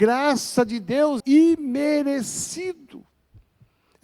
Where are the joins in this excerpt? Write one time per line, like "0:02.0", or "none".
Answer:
0:01.2